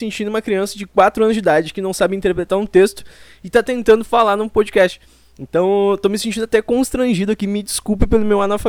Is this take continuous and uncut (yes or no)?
yes